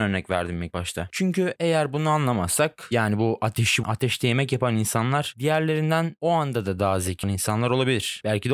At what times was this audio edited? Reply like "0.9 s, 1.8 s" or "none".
3.8 s, 7.2 s